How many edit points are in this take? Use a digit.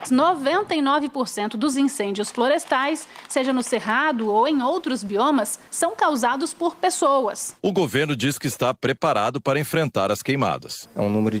1